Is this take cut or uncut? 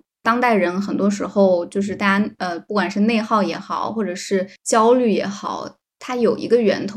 cut